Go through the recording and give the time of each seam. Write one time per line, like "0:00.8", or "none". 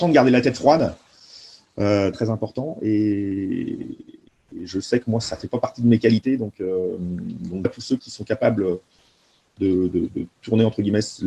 0:02.1
0:04.3
0:07.6
0:08.0